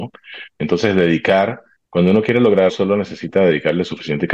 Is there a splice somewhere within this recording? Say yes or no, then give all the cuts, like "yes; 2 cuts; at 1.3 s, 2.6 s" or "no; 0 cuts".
yes; 2 cuts; at 1.8 s, 2.7 s